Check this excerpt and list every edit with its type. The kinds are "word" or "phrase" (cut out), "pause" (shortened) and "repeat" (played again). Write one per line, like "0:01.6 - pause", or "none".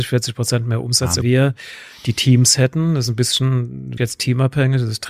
0:01.2 - phrase
0:04.0 - word